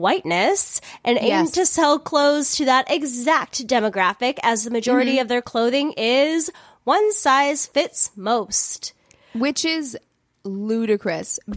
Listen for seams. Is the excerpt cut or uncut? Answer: uncut